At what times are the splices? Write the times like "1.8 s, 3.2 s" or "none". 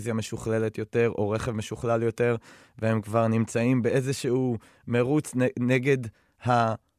none